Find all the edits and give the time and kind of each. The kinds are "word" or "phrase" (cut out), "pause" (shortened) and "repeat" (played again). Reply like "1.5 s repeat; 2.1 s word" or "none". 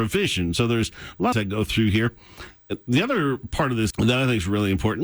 1.3 s phrase; 3.9 s word